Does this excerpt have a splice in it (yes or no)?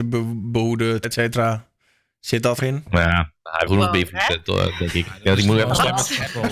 yes